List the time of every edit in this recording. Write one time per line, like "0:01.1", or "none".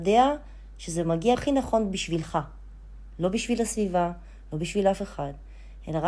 0:01.3